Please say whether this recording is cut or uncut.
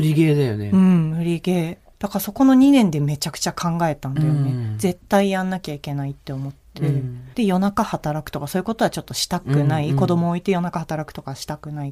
cut